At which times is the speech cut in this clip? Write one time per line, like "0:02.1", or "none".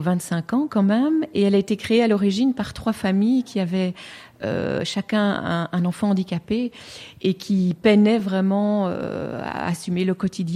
none